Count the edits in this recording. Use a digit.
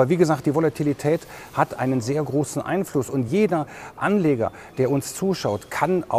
0